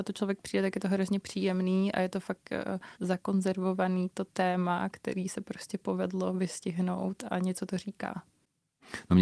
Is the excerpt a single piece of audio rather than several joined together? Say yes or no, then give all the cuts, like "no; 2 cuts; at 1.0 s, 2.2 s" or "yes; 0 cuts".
no; 1 cut; at 2.9 s